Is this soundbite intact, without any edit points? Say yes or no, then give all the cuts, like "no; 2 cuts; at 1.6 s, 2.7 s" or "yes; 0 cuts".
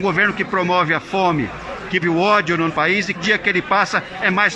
no; 3 cuts; at 2.0 s, 2.7 s, 3.1 s